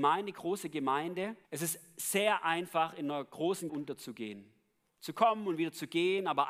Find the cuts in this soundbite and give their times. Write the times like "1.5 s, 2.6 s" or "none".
1.4 s, 3.7 s